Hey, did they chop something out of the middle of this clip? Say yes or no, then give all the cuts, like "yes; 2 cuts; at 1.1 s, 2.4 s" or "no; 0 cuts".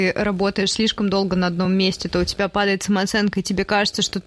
no; 0 cuts